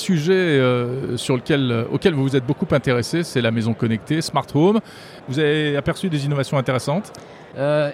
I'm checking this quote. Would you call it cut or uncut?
uncut